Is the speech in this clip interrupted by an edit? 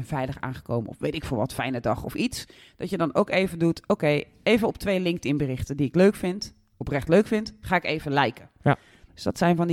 no; 0 cuts

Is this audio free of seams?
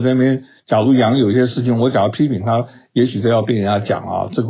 yes; 0 cuts

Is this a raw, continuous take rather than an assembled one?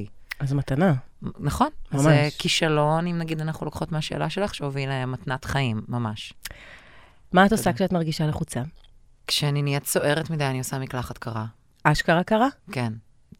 yes; 0 cuts

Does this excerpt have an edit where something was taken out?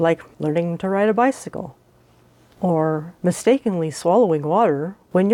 no; 0 cuts

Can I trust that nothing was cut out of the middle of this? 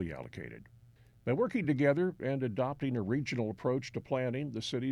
yes; 0 cuts

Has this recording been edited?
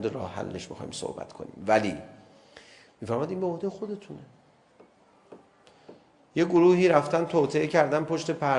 no; 0 cuts

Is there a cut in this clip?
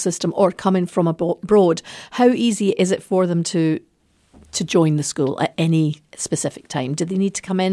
no; 0 cuts

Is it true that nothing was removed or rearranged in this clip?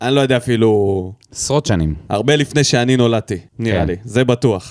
no; 1 cut; at 3.5 s

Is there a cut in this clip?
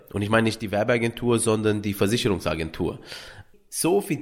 no; 0 cuts

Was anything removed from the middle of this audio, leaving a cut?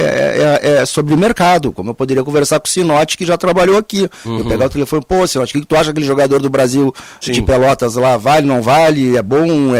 no; 0 cuts

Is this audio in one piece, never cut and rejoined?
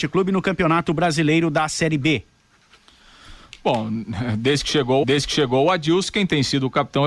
no; 1 cut; at 5.0 s

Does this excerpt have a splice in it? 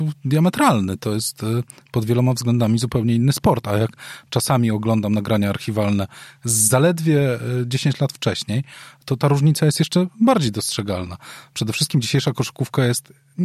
no; 0 cuts

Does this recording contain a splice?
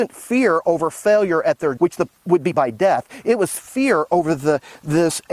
yes; 2 cuts; at 1.8 s, 2.5 s

